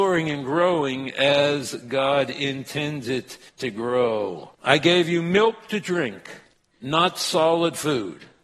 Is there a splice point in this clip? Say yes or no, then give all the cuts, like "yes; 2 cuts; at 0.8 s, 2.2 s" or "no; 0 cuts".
yes; 3 cuts; at 3.5 s, 4.5 s, 6.5 s